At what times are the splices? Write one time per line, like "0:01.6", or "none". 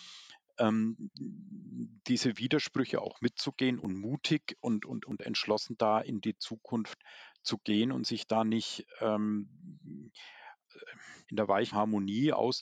0:11.2
0:11.7